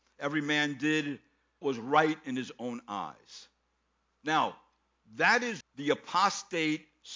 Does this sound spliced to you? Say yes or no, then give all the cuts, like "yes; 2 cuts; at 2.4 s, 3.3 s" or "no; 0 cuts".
yes; 2 cuts; at 1.6 s, 5.6 s